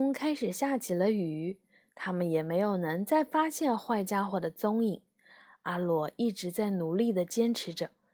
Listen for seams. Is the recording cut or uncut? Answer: uncut